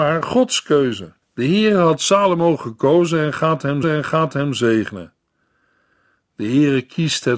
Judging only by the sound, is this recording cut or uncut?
cut